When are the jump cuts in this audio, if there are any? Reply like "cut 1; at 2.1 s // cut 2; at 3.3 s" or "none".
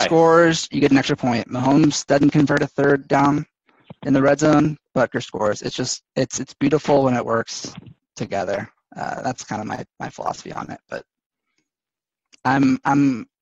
cut 1; at 6.1 s // cut 2; at 8.0 s